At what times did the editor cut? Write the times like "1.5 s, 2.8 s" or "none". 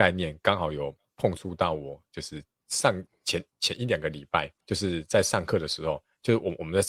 3.5 s, 4.6 s